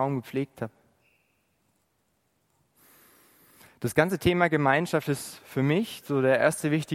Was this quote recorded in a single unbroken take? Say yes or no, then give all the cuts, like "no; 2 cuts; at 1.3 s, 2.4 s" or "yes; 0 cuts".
yes; 0 cuts